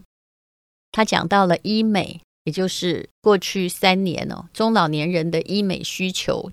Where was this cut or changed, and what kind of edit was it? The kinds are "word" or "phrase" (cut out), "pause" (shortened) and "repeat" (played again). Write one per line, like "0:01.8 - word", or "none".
none

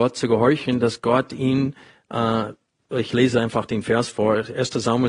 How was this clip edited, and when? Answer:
none

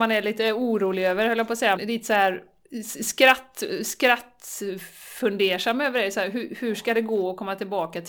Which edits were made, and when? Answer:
0:01.8 - word

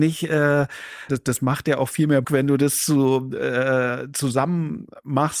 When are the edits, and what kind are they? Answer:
0:01.1 - phrase
0:02.2 - word

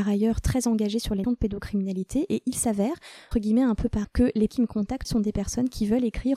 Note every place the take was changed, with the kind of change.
0:01.2 - word
0:03.3 - word
0:04.0 - word
0:04.5 - word
0:05.0 - word

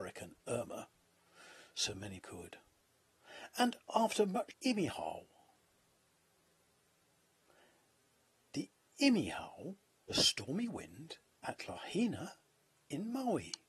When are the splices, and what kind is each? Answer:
0:02.2 - phrase
0:03.8 - pause
0:04.5 - phrase
0:10.1 - word
0:11.3 - pause

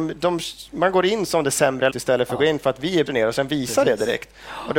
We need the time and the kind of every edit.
0:01.9 - word
0:03.1 - word

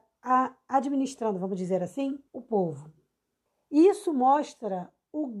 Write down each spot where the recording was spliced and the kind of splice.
0:02.3 - pause
0:03.5 - pause

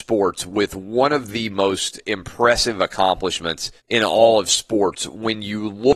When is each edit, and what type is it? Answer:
0:03.8 - pause

